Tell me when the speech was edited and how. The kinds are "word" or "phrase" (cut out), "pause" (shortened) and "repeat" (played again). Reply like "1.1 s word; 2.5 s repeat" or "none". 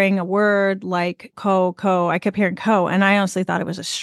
1.3 s word